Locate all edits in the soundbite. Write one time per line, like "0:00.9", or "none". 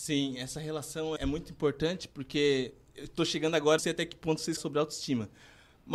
0:01.2
0:03.8
0:04.6